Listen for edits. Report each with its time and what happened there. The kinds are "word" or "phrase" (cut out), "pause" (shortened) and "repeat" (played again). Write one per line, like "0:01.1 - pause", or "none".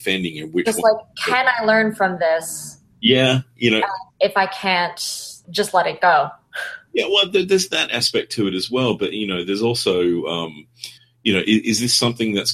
0:04.1 - pause
0:05.4 - pause
0:11.0 - pause